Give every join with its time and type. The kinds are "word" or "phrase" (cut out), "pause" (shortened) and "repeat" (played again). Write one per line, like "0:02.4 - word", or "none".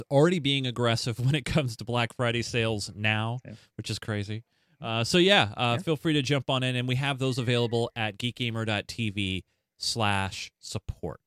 none